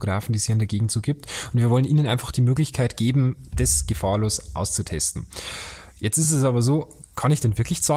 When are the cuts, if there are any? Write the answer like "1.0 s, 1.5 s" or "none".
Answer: none